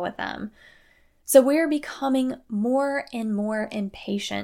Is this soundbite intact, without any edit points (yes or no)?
yes